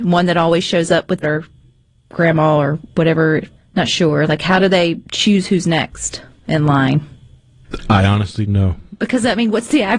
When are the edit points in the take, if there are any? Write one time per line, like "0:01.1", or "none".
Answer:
0:01.2
0:03.6
0:05.0
0:08.5